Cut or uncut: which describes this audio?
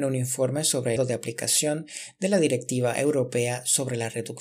cut